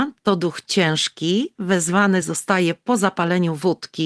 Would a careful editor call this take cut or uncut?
uncut